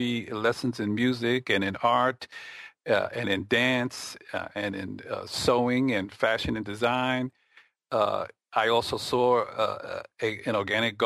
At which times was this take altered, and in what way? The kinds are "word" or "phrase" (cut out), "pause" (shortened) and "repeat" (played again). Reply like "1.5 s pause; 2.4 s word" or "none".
none